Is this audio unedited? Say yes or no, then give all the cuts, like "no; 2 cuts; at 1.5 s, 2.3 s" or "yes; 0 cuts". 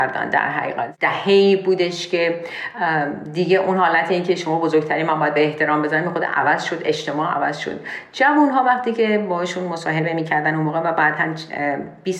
yes; 0 cuts